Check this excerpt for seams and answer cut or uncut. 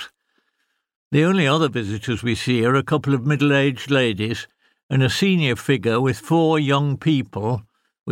uncut